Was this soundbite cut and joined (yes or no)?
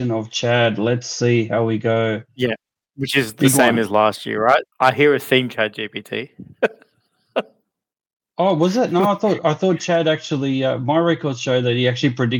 yes